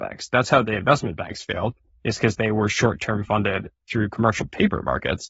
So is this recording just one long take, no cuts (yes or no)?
yes